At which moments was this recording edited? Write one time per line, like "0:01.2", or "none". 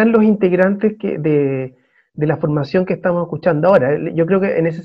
none